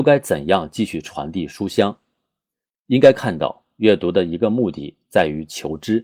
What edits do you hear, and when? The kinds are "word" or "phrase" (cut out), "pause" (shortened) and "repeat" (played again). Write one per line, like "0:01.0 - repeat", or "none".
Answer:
none